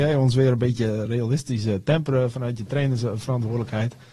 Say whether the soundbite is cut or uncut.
uncut